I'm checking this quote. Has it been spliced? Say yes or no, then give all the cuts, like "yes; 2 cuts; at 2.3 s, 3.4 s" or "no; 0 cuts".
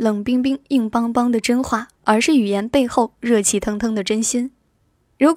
yes; 1 cut; at 2.0 s